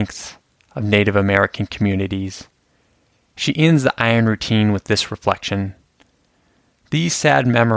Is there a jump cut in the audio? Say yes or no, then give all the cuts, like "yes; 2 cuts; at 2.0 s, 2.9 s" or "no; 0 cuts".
no; 0 cuts